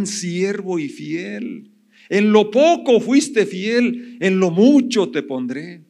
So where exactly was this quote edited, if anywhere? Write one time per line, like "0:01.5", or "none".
none